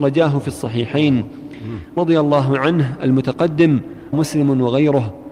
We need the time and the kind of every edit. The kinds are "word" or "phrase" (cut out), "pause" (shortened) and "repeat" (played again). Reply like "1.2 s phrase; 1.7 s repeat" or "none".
2.0 s phrase; 4.1 s word

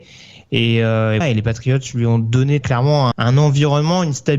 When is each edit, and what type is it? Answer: 1.2 s word; 2.6 s word; 3.1 s word

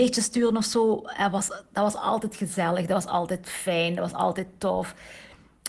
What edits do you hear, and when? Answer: none

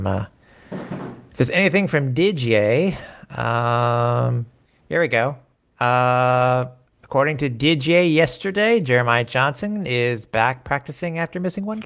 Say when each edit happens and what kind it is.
none

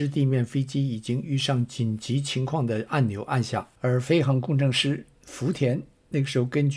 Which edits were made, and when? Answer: 3.8 s pause

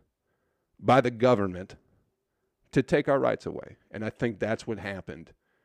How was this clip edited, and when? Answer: none

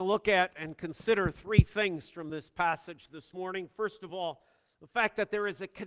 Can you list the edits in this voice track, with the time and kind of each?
none

